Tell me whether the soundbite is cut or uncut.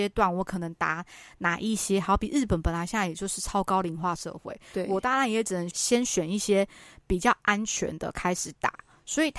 uncut